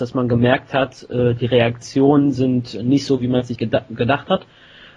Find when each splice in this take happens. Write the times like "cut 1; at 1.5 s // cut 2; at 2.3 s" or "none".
cut 1; at 3.6 s